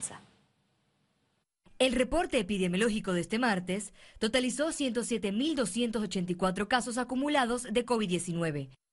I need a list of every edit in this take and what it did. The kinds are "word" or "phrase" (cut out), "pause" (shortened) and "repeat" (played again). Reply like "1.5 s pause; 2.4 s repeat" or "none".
none